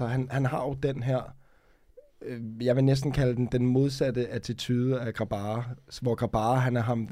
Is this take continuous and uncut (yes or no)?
yes